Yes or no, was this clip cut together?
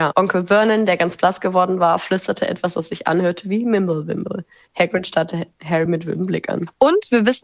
no